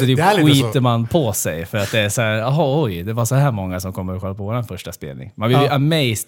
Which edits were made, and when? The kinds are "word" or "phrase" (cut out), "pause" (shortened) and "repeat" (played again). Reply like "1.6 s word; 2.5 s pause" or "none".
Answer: none